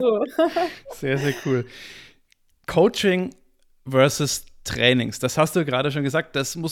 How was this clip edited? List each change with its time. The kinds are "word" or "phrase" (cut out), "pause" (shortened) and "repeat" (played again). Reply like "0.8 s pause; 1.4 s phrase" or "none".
none